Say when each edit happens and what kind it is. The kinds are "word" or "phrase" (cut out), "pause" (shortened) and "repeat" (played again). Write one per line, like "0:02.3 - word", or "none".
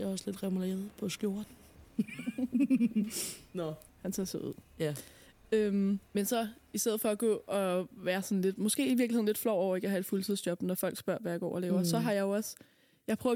0:03.9 - pause
0:06.1 - pause